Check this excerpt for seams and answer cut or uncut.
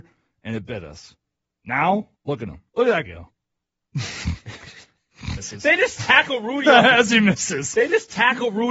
cut